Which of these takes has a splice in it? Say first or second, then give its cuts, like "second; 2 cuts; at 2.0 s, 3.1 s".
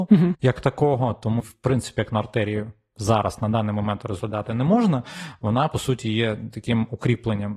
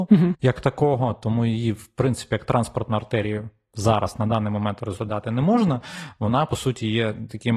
first; 2 cuts; at 1.4 s, 2.1 s